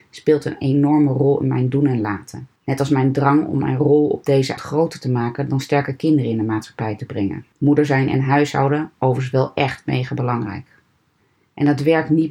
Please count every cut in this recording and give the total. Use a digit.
2